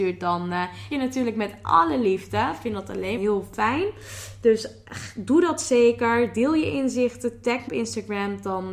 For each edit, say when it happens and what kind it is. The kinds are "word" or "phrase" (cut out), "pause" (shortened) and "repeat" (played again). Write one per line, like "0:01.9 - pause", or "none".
0:00.9 - phrase
0:03.2 - phrase
0:07.7 - word